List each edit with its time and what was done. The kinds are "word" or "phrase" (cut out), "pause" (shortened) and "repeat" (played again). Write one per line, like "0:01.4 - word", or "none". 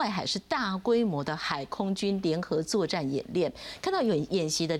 none